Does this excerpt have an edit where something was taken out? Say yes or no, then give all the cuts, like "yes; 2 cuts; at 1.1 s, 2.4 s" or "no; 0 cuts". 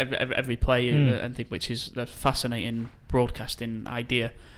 no; 0 cuts